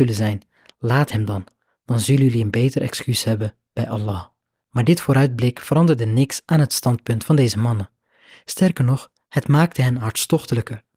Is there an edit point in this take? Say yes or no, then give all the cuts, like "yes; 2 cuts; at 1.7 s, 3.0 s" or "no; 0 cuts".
no; 0 cuts